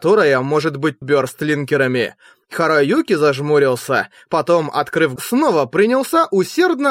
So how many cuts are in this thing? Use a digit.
2